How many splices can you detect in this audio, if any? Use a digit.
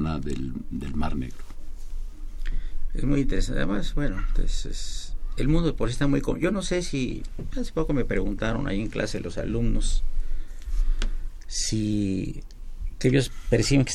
0